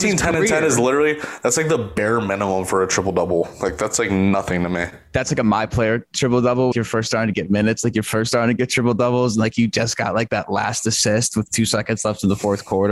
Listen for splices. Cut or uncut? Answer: cut